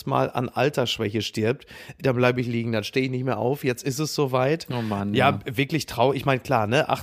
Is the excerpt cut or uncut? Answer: uncut